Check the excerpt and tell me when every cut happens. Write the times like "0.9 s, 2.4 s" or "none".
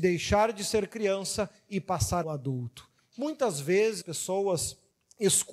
2.2 s, 4.0 s